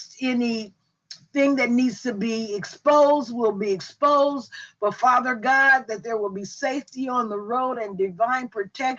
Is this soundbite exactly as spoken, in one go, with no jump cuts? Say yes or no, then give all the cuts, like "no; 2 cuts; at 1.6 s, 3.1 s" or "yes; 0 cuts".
yes; 0 cuts